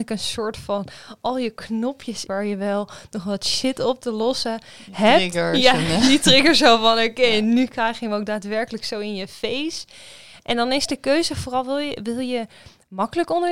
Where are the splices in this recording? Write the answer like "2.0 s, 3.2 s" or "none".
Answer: 2.3 s

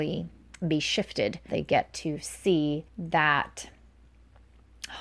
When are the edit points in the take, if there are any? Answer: 1.5 s, 2.9 s

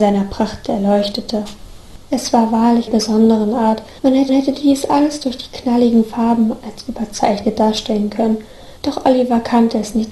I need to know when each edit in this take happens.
2.9 s, 4.0 s, 4.3 s, 8.8 s

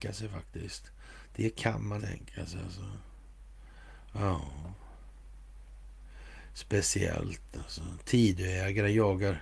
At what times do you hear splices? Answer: 2.0 s

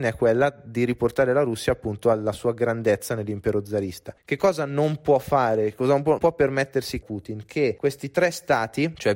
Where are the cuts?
6.2 s, 7.0 s

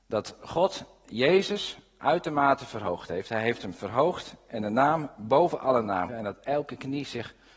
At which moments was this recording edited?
6.1 s

